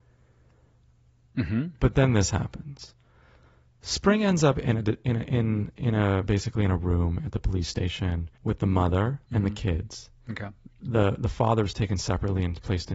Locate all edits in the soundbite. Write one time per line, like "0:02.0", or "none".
0:08.3
0:09.2